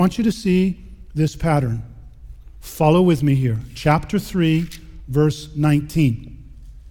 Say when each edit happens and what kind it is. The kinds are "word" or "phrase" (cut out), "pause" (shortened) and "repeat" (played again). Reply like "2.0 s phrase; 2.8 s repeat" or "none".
none